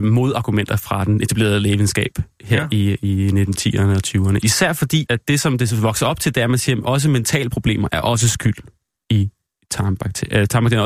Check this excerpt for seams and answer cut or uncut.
cut